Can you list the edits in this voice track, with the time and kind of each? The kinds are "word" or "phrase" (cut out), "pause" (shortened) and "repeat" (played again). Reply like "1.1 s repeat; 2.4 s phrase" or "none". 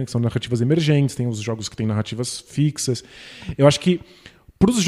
none